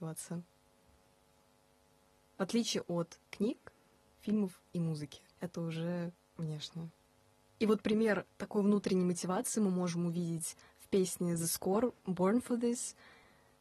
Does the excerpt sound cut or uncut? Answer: cut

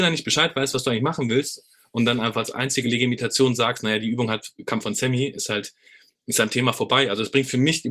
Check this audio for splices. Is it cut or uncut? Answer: uncut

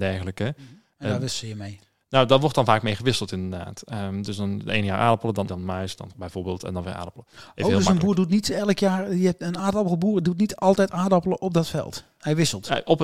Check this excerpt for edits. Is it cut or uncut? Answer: cut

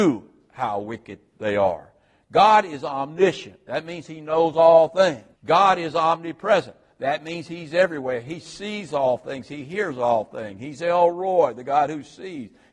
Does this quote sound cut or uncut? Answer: cut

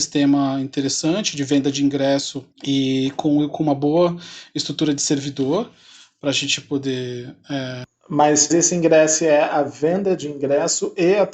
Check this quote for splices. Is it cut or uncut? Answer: cut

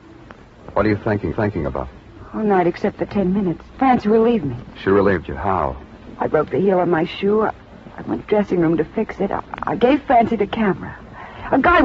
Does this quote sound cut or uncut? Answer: cut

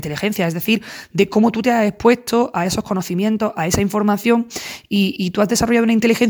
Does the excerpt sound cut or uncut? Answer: cut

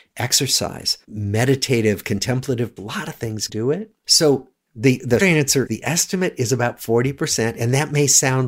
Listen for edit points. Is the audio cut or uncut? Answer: cut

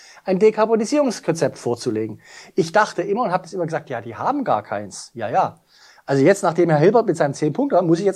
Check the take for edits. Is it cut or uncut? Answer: uncut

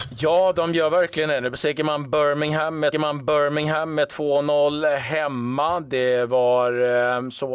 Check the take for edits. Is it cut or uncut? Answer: cut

